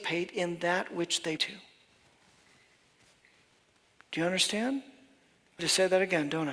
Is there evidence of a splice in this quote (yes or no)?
yes